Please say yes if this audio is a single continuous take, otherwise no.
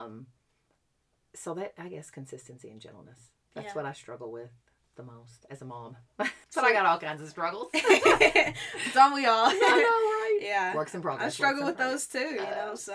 yes